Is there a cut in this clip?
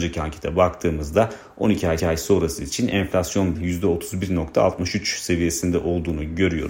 yes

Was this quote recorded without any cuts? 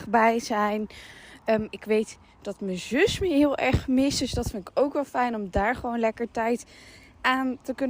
yes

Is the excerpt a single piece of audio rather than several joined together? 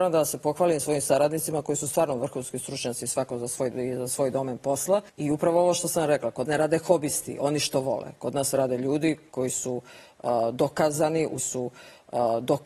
no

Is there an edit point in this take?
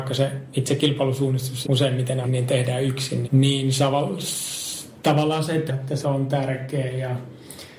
yes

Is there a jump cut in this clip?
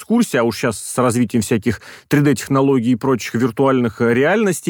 no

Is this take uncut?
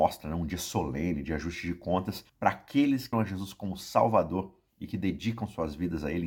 no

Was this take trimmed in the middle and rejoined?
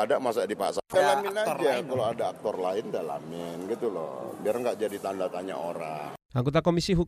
no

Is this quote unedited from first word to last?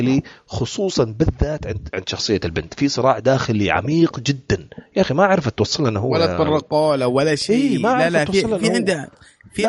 no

